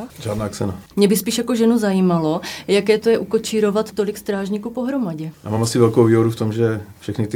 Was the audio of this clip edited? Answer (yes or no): no